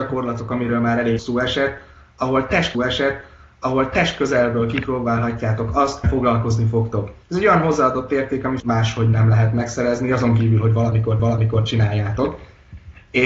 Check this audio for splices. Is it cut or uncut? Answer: cut